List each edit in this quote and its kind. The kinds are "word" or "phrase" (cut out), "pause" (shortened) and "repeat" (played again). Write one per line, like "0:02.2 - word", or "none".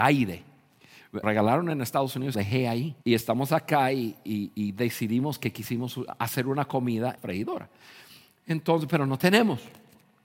0:01.2 - phrase
0:02.3 - phrase
0:03.0 - pause
0:07.2 - phrase